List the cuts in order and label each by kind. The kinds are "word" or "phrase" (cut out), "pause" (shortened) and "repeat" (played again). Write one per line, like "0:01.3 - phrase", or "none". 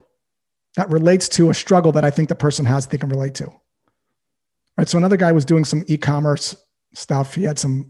none